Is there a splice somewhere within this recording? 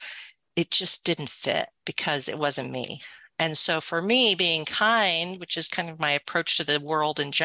yes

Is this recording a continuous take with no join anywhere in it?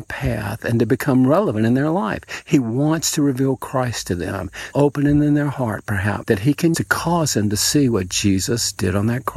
no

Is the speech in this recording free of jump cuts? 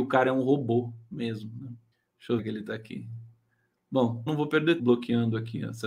no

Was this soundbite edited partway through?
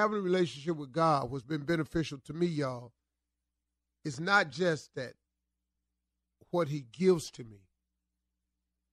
no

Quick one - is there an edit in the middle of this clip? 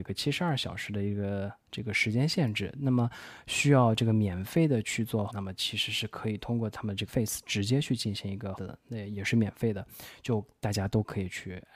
yes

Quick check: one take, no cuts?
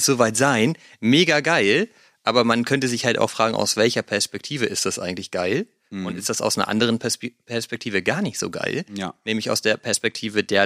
yes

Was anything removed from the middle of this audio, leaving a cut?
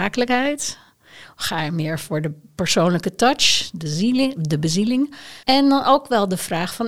yes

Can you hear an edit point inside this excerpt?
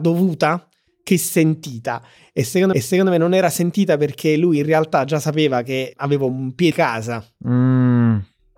yes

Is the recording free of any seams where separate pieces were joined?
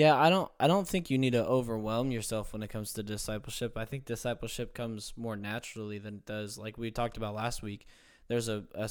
yes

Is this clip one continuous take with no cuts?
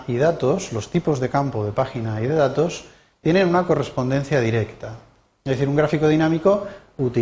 yes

